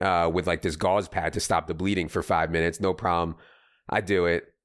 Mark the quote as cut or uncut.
uncut